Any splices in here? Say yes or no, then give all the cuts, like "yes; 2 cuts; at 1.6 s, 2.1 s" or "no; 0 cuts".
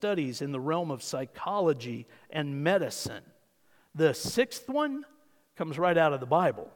no; 0 cuts